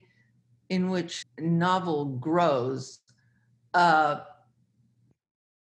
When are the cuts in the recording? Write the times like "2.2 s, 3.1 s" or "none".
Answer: 1.2 s